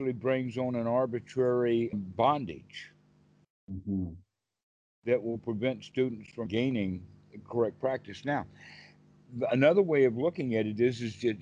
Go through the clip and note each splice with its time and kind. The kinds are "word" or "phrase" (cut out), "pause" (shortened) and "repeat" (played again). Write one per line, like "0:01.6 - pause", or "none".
0:01.9 - word
0:06.5 - word